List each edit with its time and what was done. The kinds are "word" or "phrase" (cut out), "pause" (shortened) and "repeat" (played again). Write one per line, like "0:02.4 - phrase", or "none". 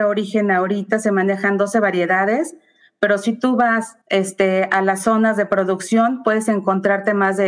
0:04.0 - pause